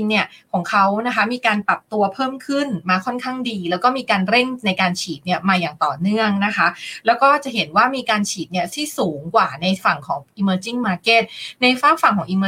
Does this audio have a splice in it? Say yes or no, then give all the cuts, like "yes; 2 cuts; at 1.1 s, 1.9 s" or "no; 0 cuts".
no; 0 cuts